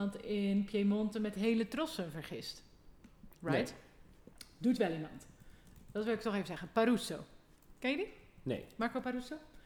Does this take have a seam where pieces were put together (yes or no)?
no